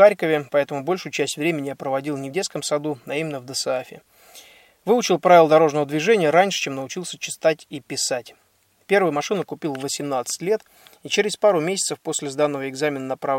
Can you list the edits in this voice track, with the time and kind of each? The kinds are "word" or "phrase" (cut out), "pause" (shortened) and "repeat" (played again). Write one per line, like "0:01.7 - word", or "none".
none